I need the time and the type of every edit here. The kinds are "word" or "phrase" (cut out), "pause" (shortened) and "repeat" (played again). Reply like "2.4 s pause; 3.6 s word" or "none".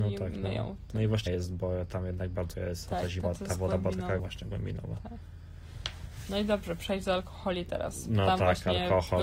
1.3 s phrase; 2.5 s word; 3.2 s word; 4.2 s phrase